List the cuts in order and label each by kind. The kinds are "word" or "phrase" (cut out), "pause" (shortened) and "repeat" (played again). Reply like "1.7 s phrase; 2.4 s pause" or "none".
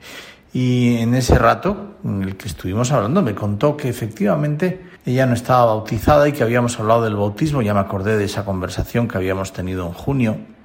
5.0 s pause